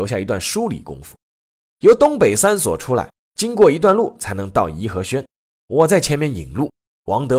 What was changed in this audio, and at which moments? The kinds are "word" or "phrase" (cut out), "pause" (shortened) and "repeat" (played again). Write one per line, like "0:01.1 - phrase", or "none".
none